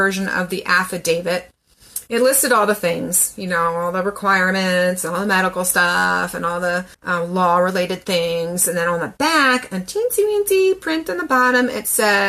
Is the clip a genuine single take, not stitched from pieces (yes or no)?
no